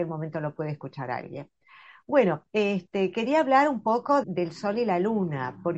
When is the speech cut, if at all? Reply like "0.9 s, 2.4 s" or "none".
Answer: 2.5 s, 4.2 s